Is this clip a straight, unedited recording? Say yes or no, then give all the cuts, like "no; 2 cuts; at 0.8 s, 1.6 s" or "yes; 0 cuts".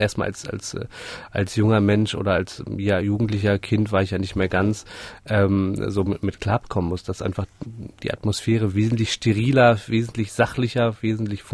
yes; 0 cuts